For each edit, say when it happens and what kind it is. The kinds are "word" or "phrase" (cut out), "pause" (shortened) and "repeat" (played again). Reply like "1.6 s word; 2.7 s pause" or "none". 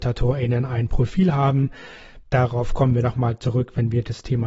2.2 s pause